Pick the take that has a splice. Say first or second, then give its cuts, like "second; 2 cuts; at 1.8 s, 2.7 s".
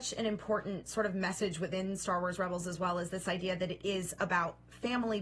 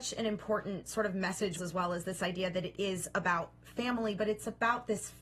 second; 1 cut; at 1.6 s